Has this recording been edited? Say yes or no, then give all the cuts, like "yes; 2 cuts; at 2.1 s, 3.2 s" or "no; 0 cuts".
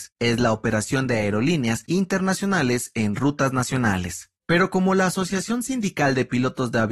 no; 0 cuts